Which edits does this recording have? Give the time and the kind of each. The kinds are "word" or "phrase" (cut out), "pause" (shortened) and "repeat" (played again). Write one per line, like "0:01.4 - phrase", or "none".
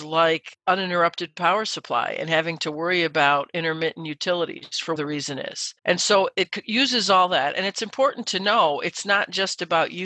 0:05.0 - word
0:05.8 - pause